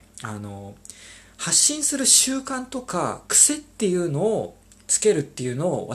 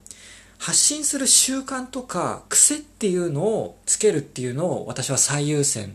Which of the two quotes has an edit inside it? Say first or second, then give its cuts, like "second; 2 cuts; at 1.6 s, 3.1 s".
second; 1 cut; at 3.8 s